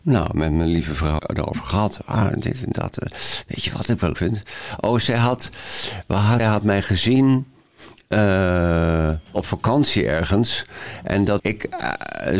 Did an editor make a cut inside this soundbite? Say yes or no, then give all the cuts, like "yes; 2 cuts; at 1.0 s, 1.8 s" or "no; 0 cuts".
yes; 5 cuts; at 1.2 s, 4.1 s, 6.4 s, 9.3 s, 11.4 s